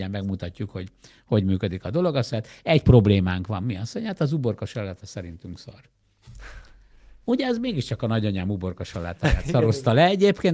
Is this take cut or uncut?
uncut